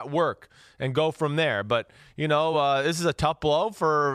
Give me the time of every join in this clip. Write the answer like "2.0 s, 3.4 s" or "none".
none